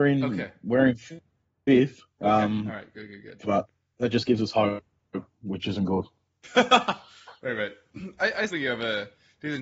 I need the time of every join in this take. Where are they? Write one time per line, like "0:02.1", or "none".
0:08.5